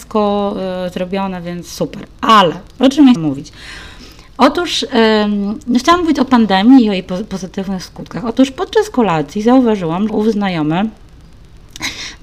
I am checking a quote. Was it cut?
yes; 2 cuts; at 3.2 s, 10.1 s

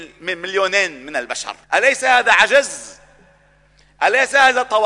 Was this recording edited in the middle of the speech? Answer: yes; 1 cut; at 1.6 s

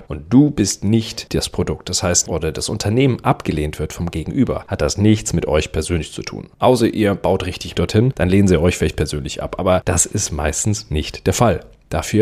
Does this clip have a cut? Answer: yes; 3 cuts; at 2.3 s, 6.5 s, 7.7 s

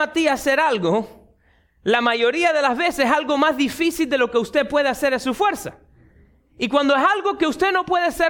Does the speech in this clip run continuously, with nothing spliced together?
yes; 0 cuts

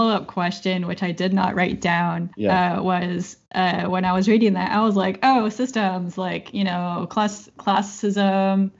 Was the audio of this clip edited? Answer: yes; 1 cut; at 2.3 s

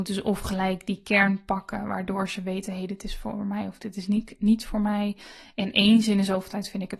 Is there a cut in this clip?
no; 0 cuts

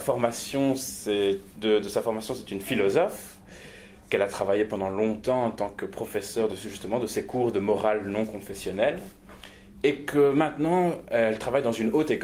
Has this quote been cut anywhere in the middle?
yes; 2 cuts; at 1.5 s, 6.5 s

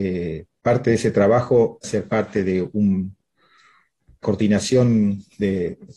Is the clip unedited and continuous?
no; 2 cuts; at 1.8 s, 4.2 s

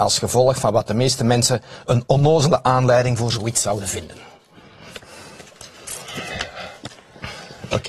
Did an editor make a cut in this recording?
no; 0 cuts

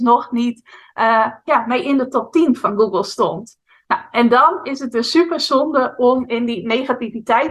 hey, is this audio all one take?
yes; 0 cuts

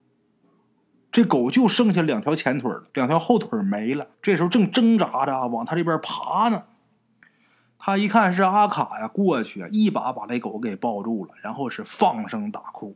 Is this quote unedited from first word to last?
no; 2 cuts; at 2.9 s, 4.1 s

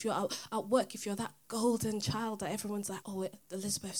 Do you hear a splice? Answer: yes; 1 cut; at 3.0 s

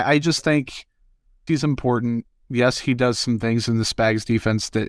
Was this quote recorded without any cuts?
no; 1 cut; at 1.5 s

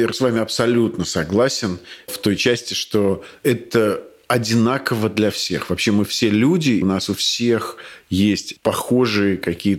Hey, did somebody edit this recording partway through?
yes; 1 cut; at 6.8 s

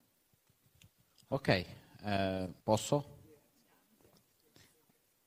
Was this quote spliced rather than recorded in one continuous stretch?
yes; 1 cut; at 2.6 s

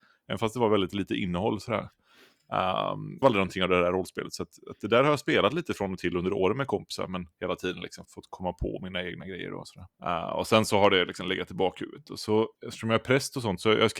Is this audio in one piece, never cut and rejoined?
no; 5 cuts; at 3.2 s, 7.3 s, 8.0 s, 9.9 s, 12.5 s

